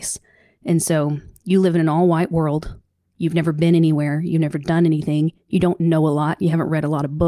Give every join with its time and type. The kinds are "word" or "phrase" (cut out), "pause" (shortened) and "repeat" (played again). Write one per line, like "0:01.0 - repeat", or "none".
none